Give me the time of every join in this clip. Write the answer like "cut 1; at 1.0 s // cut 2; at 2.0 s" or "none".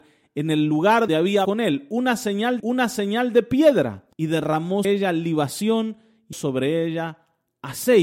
cut 1; at 1.1 s // cut 2; at 1.4 s // cut 3; at 2.6 s // cut 4; at 4.1 s // cut 5; at 4.8 s // cut 6; at 6.3 s